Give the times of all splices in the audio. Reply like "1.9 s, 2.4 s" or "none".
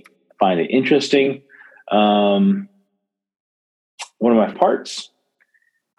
4.5 s